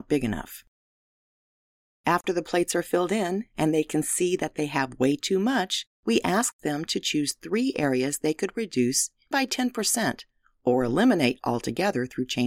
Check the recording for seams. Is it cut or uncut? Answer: cut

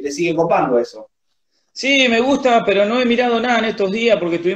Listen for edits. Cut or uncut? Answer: uncut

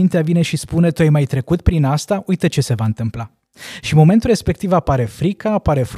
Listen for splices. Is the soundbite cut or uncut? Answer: uncut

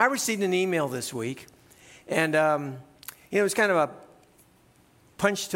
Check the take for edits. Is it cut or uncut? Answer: uncut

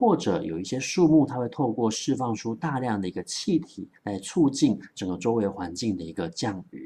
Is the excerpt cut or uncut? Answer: cut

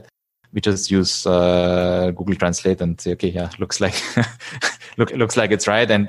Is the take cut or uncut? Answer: cut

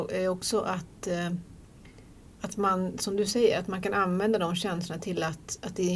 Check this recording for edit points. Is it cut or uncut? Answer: uncut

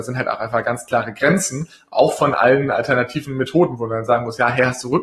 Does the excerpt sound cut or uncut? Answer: uncut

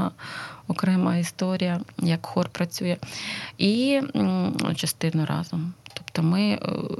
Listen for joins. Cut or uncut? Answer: cut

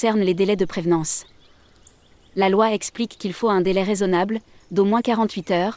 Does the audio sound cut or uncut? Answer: uncut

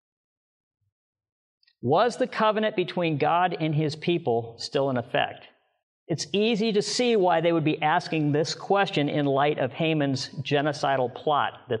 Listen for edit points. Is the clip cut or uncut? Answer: cut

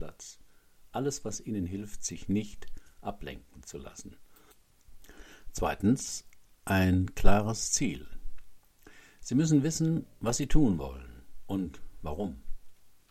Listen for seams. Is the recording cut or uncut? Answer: cut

